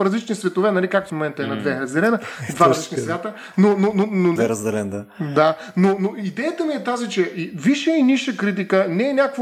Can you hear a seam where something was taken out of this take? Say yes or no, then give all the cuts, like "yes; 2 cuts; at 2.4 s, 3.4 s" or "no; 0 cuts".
yes; 2 cuts; at 1.1 s, 4.4 s